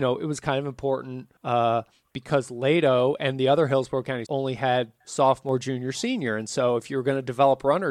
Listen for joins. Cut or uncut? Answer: cut